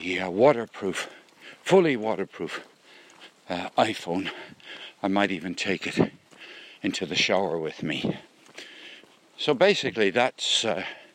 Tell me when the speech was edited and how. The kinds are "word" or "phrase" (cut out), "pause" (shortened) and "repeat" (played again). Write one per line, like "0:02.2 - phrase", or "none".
none